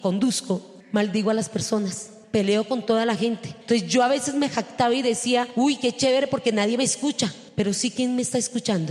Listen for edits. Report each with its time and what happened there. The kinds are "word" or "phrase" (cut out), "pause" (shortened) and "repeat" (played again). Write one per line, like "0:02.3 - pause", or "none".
none